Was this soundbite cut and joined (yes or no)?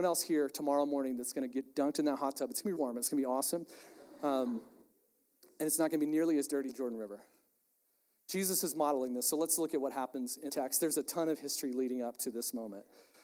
yes